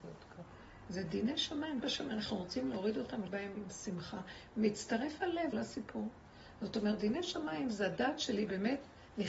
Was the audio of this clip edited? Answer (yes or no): yes